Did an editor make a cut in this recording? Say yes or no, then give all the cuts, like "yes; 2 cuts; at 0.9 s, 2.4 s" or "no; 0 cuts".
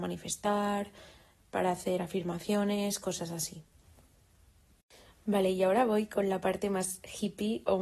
no; 0 cuts